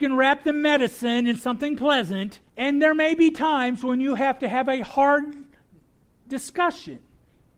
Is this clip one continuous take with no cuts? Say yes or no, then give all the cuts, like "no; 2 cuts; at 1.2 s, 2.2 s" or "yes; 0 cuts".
no; 1 cut; at 2.5 s